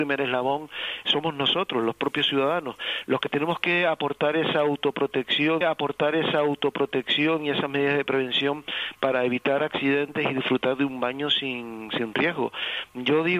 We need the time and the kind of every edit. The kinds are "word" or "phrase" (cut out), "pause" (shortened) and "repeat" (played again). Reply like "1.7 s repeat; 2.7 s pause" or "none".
5.6 s repeat